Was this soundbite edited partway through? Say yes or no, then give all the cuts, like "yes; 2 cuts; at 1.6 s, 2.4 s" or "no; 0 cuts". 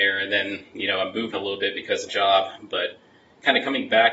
yes; 2 cuts; at 1.3 s, 2.1 s